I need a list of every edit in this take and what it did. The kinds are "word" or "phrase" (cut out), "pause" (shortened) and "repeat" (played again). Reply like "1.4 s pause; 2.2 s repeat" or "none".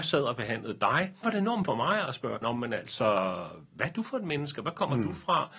1.2 s word; 1.7 s word; 2.4 s word